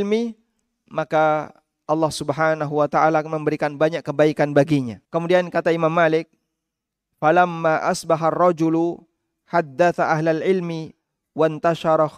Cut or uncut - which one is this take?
cut